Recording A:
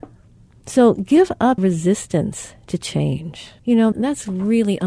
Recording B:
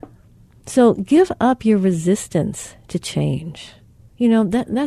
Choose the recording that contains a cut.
A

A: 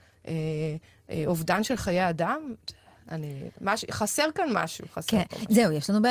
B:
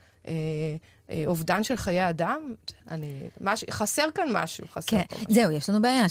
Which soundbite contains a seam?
B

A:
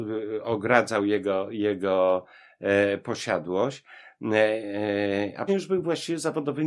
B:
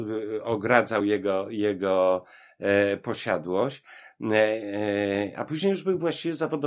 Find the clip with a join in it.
A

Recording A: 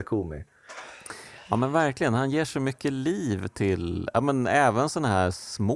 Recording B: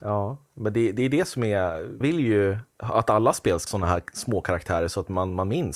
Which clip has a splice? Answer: B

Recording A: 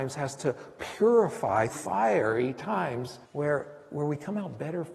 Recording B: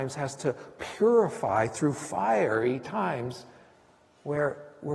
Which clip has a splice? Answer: A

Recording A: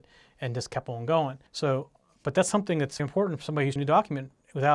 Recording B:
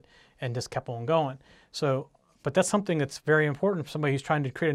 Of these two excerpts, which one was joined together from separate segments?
A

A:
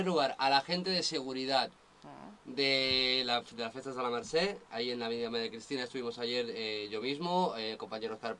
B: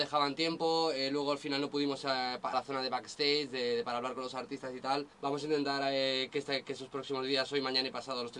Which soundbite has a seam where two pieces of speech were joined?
B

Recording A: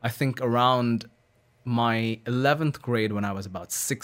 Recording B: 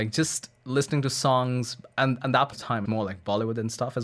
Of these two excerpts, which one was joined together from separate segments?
B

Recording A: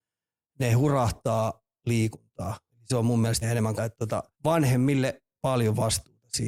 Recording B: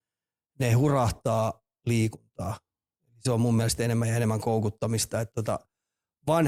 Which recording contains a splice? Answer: A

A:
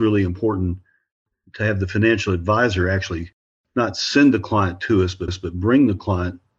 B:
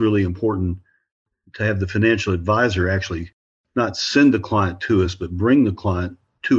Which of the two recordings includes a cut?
A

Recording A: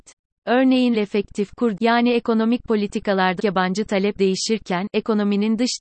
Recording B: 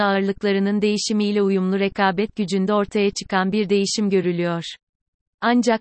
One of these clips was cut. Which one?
A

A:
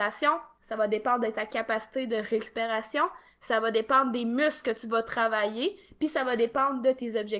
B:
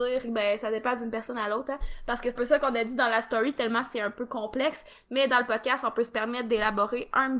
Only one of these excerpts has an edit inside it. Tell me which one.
B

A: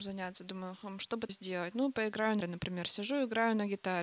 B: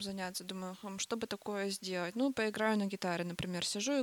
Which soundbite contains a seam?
A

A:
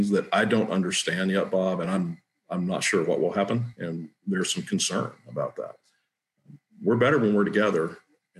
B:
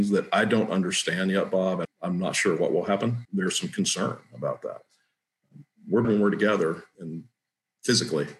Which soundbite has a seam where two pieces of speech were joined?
B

